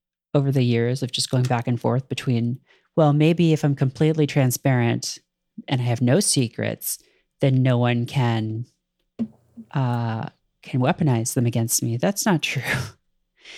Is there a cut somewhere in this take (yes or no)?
no